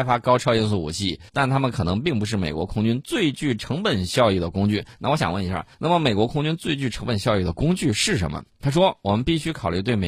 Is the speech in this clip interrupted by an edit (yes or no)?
yes